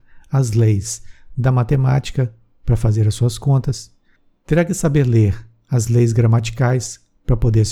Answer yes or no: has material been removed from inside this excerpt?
no